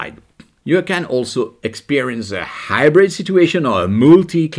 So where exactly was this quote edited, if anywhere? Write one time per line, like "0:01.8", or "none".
none